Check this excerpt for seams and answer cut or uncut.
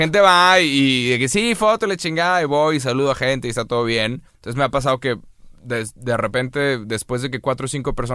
cut